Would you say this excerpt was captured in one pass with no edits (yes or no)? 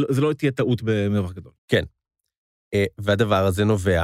no